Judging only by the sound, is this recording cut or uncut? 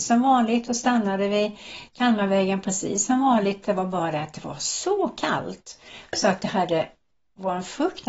uncut